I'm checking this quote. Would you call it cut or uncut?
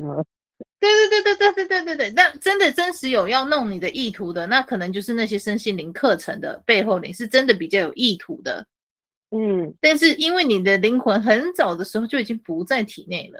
uncut